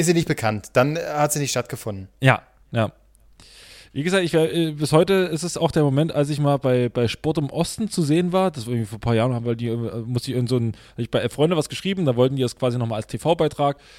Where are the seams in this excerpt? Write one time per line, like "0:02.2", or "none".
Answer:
none